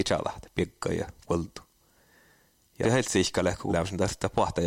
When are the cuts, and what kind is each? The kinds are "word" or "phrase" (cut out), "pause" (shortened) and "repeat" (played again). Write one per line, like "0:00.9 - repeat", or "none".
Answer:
0:02.8 - word
0:03.7 - word